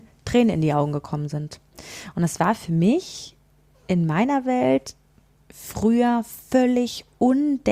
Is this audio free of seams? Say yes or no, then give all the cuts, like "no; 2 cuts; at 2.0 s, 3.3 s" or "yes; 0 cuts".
yes; 0 cuts